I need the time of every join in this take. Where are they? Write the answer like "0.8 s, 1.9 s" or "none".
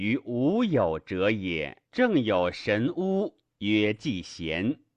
1.9 s